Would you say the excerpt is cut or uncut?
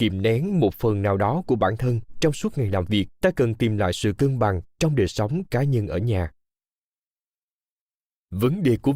cut